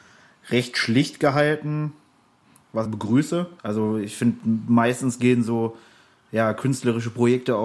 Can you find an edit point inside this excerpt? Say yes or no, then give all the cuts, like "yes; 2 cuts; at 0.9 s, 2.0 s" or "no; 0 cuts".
yes; 2 cuts; at 2.9 s, 3.6 s